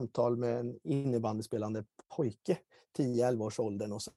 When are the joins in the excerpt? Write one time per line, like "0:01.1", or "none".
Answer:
none